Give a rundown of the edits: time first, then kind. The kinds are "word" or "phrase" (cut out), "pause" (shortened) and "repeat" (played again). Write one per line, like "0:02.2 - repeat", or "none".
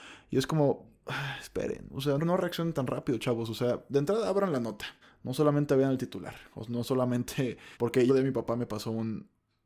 0:02.2 - word
0:05.0 - pause
0:07.7 - pause
0:08.1 - phrase